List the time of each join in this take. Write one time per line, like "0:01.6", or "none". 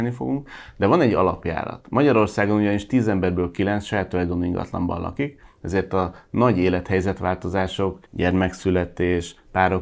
0:08.0